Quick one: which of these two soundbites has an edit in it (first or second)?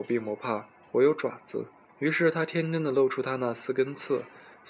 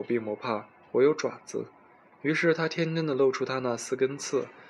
first